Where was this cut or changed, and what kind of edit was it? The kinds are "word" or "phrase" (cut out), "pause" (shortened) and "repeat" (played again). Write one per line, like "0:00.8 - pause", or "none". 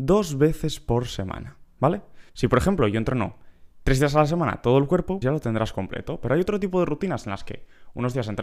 0:02.3 - pause
0:05.2 - word